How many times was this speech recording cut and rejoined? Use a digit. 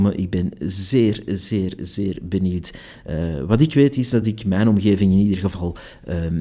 0